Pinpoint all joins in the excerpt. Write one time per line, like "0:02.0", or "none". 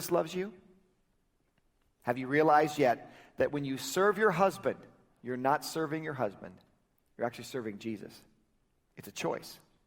0:06.9